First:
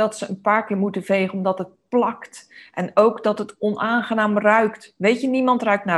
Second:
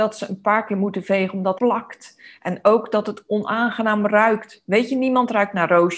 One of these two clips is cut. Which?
second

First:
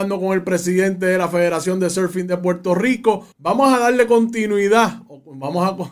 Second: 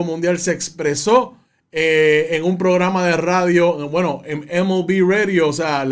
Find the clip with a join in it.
first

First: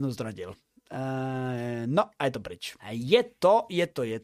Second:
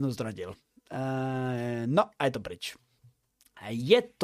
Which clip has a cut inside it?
first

